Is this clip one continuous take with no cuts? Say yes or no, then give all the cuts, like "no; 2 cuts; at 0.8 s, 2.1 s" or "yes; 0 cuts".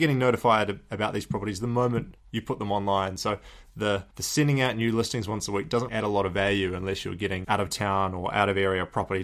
no; 3 cuts; at 4.1 s, 5.9 s, 7.4 s